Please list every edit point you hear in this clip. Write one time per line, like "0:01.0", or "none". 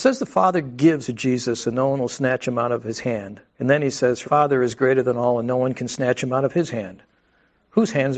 0:01.0
0:03.5
0:04.2